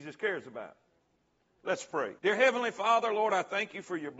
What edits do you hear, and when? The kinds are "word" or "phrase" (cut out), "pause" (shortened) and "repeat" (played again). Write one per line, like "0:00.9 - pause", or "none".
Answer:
0:02.2 - pause